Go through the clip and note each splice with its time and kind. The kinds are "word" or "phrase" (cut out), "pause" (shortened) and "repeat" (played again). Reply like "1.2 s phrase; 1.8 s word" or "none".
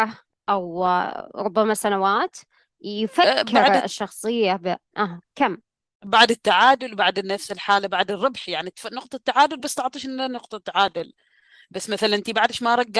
none